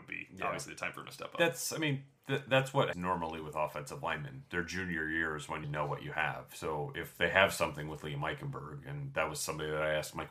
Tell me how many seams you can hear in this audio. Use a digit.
2